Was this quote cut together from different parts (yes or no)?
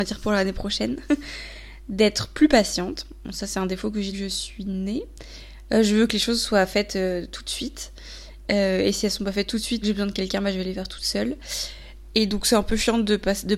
yes